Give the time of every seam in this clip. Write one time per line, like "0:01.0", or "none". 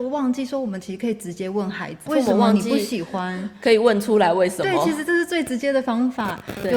0:02.1